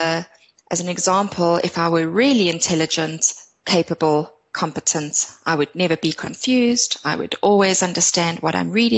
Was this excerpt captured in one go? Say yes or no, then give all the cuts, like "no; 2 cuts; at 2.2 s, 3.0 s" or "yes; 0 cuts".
yes; 0 cuts